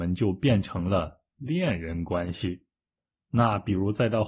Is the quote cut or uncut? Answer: uncut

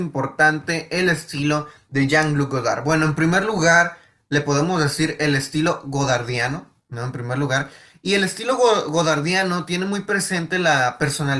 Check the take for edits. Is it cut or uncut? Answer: uncut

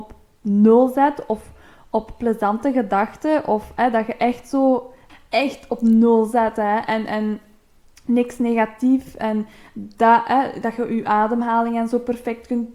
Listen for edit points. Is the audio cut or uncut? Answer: uncut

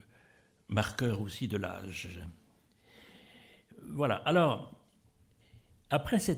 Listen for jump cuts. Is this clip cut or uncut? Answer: uncut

